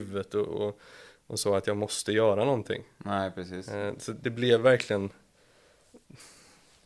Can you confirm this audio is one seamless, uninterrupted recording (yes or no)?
yes